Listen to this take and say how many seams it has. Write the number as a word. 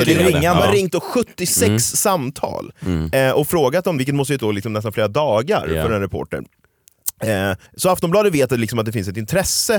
three